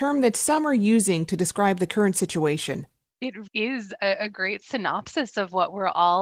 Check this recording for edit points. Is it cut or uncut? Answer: cut